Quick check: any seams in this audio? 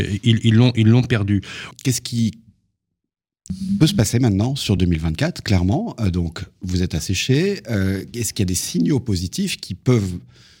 no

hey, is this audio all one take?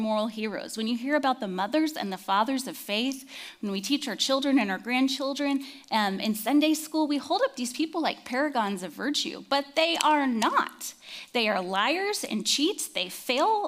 yes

